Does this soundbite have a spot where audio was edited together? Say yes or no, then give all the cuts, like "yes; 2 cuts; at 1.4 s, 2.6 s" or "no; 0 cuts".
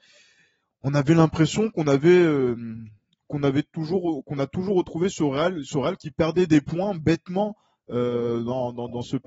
no; 0 cuts